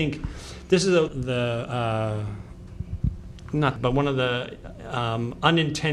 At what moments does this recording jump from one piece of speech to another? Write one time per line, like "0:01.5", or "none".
0:01.1
0:03.8